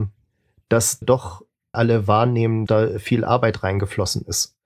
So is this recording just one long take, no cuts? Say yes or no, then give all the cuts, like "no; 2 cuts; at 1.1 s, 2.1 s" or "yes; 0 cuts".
no; 3 cuts; at 1.0 s, 1.7 s, 2.7 s